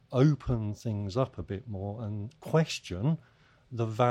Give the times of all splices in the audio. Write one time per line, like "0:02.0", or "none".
none